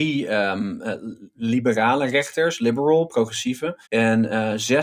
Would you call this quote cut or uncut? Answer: cut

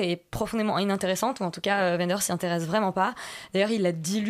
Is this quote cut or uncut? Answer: uncut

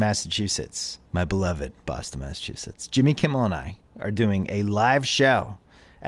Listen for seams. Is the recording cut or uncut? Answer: cut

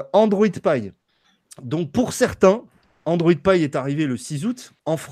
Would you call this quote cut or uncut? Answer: uncut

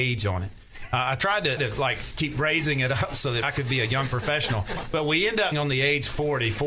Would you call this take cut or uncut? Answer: cut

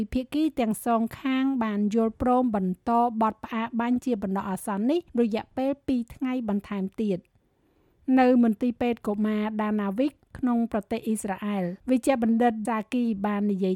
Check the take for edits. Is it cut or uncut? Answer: cut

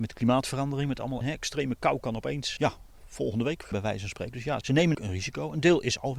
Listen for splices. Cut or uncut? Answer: cut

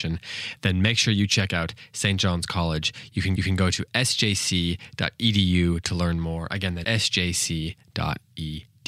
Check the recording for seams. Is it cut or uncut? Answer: cut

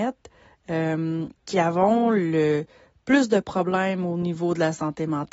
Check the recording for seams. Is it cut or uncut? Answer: cut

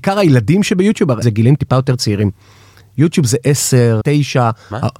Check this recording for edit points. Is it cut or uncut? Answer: cut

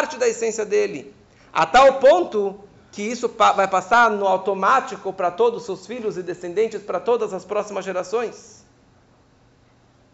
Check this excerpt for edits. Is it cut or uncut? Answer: uncut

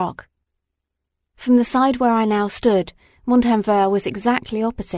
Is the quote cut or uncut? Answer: uncut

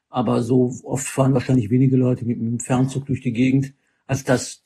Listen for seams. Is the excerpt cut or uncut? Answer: uncut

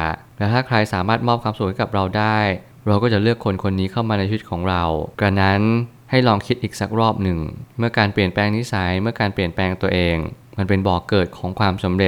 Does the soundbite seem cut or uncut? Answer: cut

